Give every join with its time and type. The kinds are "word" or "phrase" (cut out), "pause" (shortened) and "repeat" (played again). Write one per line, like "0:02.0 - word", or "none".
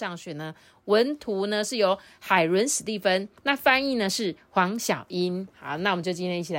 0:03.4 - pause